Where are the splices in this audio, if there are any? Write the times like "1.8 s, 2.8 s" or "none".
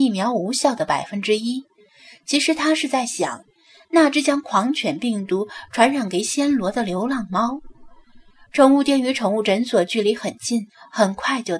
none